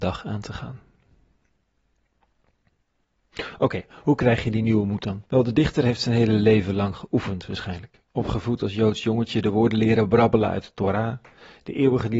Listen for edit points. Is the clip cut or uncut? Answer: cut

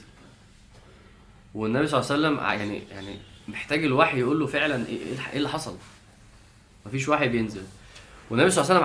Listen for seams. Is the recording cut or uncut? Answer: uncut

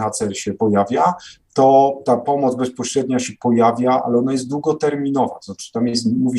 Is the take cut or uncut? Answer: uncut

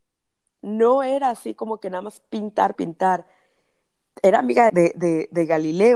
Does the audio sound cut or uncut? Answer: cut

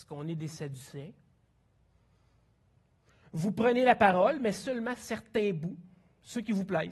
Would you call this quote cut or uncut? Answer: uncut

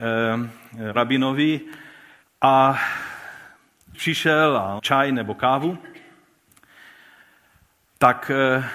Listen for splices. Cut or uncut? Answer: cut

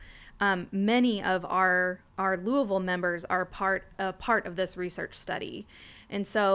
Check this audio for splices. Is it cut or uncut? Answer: cut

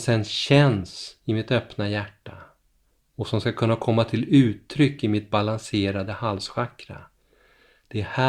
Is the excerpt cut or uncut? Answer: uncut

